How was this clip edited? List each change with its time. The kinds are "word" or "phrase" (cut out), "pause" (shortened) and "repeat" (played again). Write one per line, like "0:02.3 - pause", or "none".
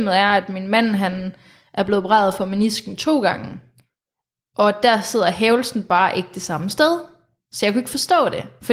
none